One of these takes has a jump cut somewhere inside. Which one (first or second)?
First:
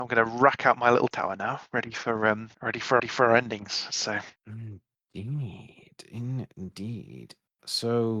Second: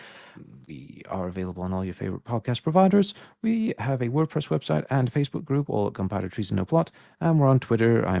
first